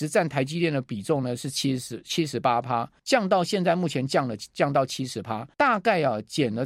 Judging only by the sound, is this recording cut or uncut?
cut